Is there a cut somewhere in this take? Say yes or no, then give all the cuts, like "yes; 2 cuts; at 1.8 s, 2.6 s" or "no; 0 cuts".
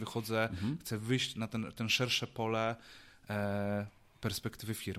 no; 0 cuts